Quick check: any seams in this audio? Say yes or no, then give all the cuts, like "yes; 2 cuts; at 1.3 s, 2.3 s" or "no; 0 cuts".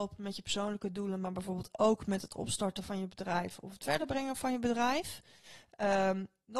no; 0 cuts